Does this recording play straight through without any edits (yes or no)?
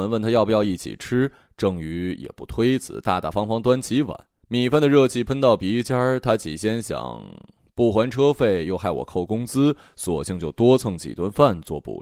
no